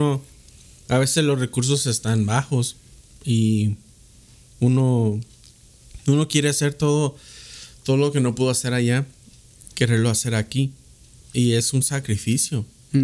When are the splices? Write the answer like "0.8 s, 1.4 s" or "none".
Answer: none